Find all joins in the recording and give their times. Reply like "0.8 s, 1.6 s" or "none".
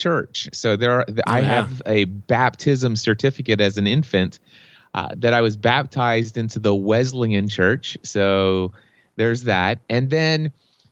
none